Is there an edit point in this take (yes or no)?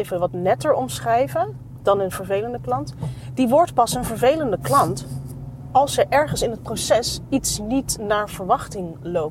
no